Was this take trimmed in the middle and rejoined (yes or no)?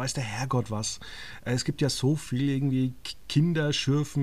no